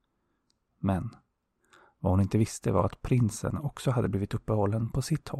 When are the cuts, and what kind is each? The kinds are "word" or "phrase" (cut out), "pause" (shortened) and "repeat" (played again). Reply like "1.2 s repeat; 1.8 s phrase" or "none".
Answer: none